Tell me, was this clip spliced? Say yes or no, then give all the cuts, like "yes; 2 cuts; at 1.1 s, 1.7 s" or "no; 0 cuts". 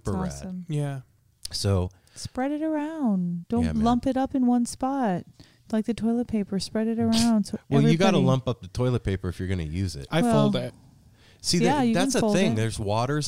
no; 0 cuts